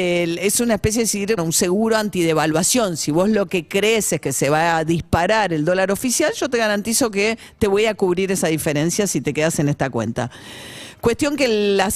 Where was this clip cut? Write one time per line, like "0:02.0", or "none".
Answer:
0:01.4